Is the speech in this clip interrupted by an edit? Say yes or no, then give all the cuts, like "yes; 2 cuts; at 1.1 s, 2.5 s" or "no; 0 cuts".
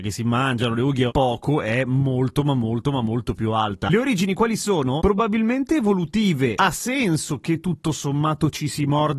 yes; 2 cuts; at 1.1 s, 6.6 s